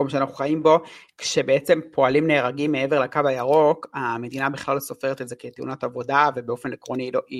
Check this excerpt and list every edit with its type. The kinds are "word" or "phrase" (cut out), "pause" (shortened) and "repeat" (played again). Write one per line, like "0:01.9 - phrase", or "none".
none